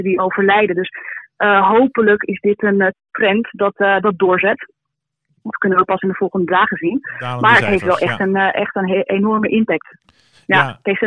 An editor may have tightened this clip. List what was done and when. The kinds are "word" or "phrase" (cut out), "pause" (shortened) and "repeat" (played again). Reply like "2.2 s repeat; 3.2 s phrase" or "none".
none